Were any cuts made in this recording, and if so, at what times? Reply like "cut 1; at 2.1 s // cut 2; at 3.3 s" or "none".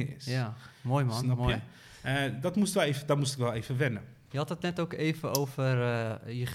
none